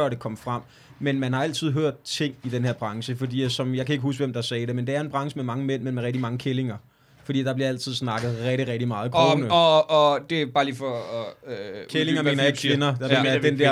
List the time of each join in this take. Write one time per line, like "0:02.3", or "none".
none